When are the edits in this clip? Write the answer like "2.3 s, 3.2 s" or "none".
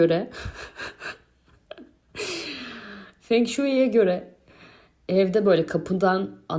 none